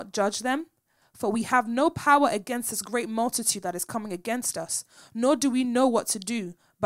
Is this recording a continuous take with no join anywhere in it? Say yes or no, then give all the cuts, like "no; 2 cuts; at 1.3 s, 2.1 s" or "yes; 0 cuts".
yes; 0 cuts